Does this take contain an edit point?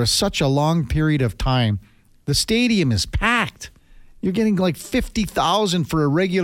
no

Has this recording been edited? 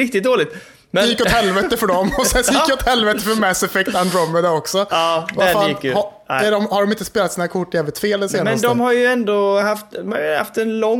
no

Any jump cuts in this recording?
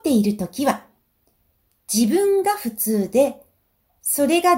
no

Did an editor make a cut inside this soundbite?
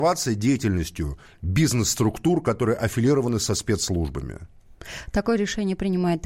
no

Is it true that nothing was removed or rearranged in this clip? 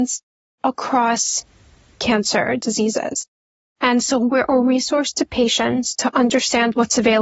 yes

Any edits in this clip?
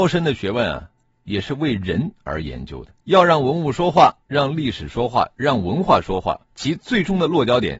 yes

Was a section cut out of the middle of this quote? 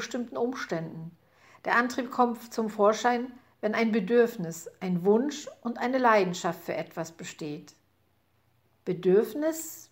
no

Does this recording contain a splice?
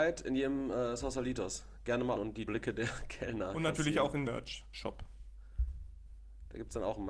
yes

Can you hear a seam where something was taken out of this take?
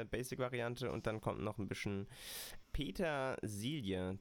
yes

